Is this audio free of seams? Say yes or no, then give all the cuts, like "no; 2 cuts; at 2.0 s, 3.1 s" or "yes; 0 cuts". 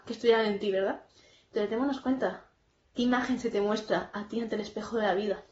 yes; 0 cuts